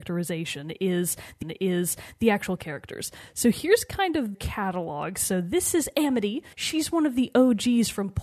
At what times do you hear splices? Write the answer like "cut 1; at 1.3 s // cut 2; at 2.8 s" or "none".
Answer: cut 1; at 1.4 s // cut 2; at 4.3 s // cut 3; at 6.5 s